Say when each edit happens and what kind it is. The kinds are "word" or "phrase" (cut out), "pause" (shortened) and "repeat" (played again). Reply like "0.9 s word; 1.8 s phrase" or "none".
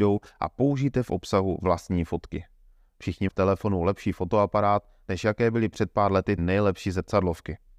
3.3 s word; 6.4 s word